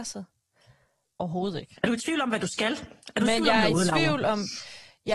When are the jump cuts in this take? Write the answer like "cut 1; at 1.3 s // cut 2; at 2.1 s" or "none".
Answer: none